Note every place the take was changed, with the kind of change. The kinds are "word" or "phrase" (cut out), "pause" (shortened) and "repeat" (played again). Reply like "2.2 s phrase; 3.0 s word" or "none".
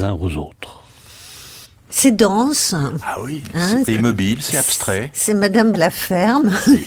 1.6 s pause; 3.9 s word; 5.7 s word